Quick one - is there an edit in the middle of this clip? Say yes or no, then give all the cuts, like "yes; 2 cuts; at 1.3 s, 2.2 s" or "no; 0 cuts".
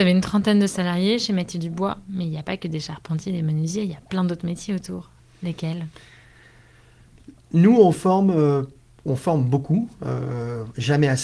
no; 0 cuts